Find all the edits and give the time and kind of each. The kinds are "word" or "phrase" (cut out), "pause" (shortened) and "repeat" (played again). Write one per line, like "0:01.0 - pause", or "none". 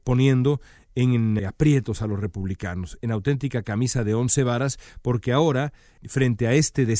0:01.4 - word